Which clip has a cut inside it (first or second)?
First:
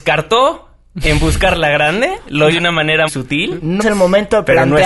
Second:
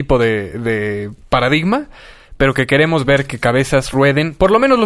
first